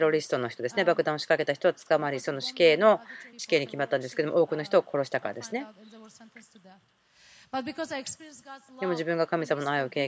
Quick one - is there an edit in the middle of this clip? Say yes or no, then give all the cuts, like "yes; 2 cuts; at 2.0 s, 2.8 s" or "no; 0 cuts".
yes; 1 cut; at 3.3 s